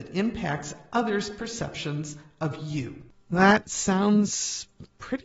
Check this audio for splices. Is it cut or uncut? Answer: uncut